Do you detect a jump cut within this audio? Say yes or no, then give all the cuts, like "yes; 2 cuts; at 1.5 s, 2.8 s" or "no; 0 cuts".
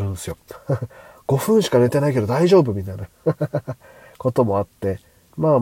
no; 0 cuts